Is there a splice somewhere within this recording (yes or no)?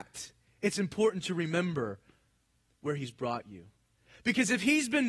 no